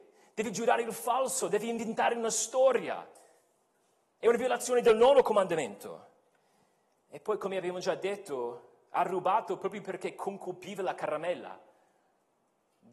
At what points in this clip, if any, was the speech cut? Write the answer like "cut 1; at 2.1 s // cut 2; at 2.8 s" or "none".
none